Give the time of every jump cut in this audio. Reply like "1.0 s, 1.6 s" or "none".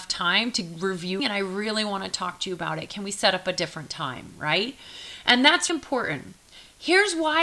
1.2 s, 5.7 s